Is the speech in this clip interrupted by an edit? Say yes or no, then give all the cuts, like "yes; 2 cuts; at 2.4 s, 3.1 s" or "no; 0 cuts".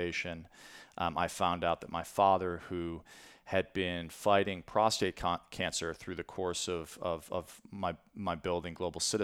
no; 0 cuts